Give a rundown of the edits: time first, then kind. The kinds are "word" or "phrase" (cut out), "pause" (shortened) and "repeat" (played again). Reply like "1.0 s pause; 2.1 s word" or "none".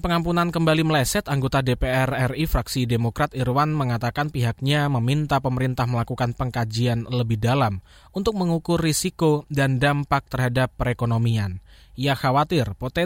none